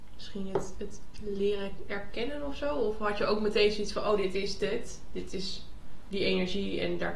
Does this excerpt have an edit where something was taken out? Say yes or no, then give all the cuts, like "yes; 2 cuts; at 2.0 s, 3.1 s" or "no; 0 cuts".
no; 0 cuts